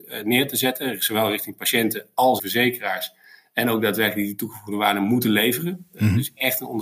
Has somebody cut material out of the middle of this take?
yes; 1 cut; at 2.4 s

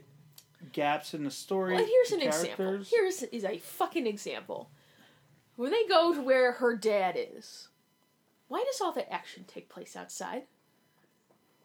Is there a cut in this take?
no; 0 cuts

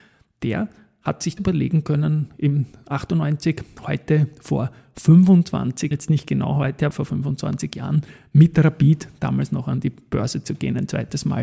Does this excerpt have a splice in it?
yes; 3 cuts; at 1.4 s, 5.9 s, 6.9 s

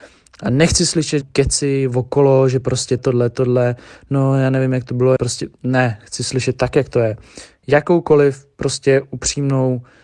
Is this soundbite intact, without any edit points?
no; 3 cuts; at 1.2 s, 3.0 s, 5.2 s

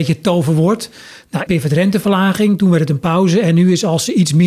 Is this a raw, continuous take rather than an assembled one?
no; 1 cut; at 1.5 s

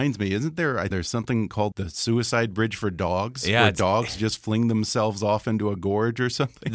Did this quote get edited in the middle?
yes; 2 cuts; at 0.9 s, 1.7 s

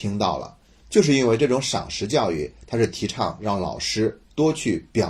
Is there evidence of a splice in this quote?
no; 0 cuts

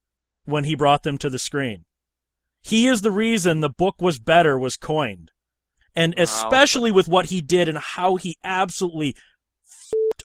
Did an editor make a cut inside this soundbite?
no; 0 cuts

